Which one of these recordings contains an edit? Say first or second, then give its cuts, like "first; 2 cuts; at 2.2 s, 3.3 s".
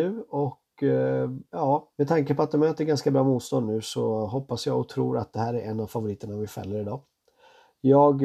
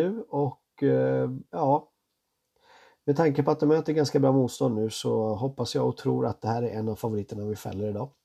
first; 1 cut; at 1.9 s